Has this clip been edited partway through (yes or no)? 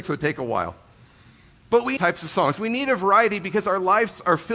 yes